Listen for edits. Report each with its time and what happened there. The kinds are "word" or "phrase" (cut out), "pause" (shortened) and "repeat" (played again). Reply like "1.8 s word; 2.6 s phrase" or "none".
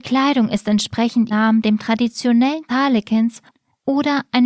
1.3 s word; 2.7 s phrase